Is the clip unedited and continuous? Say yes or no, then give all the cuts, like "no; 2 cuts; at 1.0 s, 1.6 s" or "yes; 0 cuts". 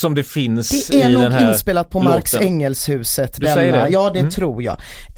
yes; 0 cuts